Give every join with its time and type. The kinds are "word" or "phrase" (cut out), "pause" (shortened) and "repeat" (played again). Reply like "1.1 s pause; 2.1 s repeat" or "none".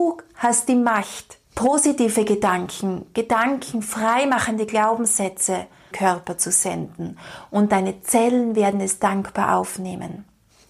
1.4 s pause; 5.9 s phrase

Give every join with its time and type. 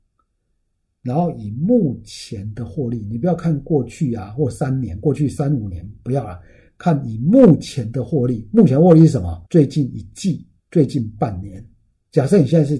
9.5 s pause; 10.6 s pause

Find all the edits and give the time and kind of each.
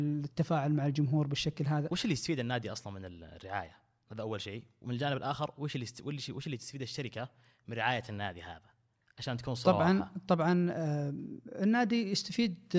none

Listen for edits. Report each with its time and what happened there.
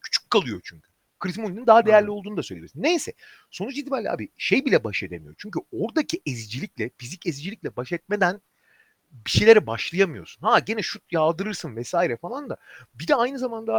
none

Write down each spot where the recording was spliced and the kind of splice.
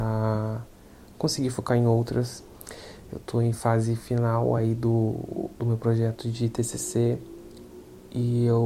none

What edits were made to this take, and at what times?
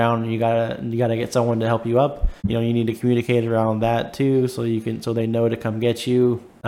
2.4 s pause

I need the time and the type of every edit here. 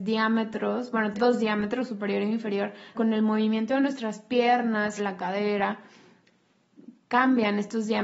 1.1 s word; 2.9 s word; 5.0 s word

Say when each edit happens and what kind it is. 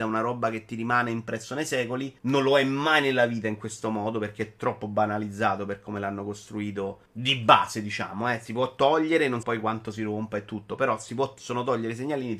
2.2 s pause; 7.1 s pause; 9.4 s word

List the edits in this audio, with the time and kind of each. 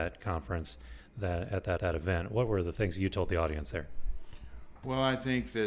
1.8 s repeat

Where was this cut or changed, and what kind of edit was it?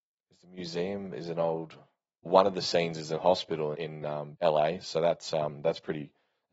2.3 s word; 3.2 s word; 3.7 s word; 4.3 s word

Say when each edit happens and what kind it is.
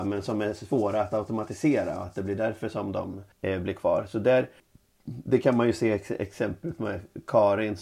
3.3 s pause; 4.6 s pause

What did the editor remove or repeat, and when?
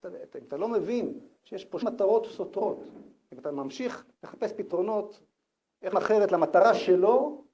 1.4 s pause; 1.8 s word; 4.1 s pause; 5.9 s word

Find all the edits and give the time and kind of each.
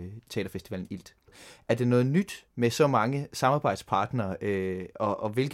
2.5 s pause

